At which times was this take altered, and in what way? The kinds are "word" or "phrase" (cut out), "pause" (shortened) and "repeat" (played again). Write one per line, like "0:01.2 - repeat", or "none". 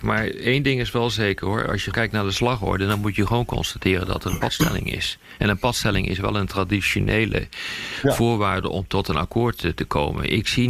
0:01.9 - word